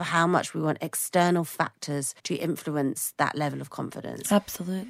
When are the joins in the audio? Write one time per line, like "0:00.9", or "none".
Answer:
0:02.2